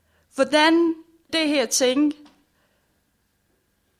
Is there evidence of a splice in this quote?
yes; 1 cut; at 1.3 s

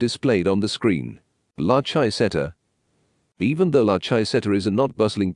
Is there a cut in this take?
no; 0 cuts

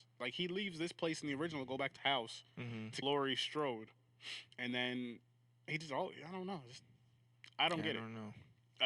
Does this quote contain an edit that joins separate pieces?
yes; 3 cuts; at 2.0 s, 3.0 s, 4.5 s

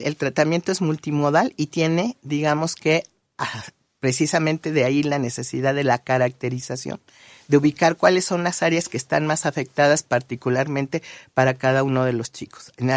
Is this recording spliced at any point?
no; 0 cuts

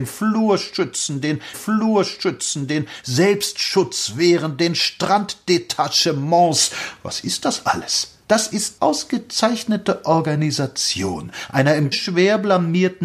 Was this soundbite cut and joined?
yes; 4 cuts; at 1.5 s, 8.2 s, 8.8 s, 11.9 s

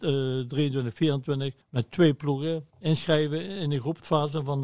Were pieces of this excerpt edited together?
yes; 2 cuts; at 1.6 s, 2.7 s

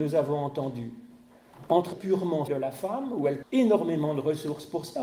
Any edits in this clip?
yes; 3 cuts; at 1.9 s, 2.5 s, 3.4 s

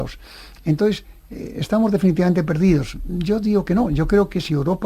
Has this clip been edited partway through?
no; 0 cuts

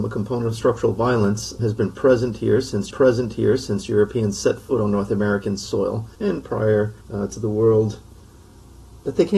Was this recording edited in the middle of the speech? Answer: yes; 4 cuts; at 1.6 s, 2.9 s, 6.2 s, 7.0 s

